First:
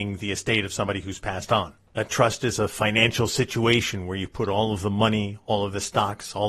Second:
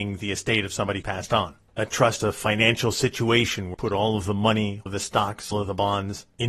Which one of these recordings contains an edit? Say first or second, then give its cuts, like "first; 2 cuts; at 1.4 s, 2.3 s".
second; 5 cuts; at 1.0 s, 2.2 s, 3.7 s, 4.9 s, 5.5 s